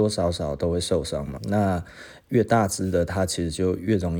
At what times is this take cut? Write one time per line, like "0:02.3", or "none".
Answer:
0:01.4